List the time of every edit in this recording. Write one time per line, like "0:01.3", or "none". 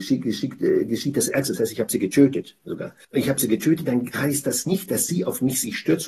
0:03.0